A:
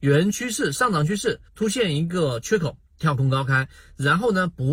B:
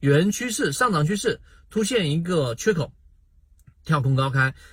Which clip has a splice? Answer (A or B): A